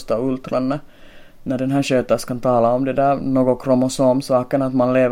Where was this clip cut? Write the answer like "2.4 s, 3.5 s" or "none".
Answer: none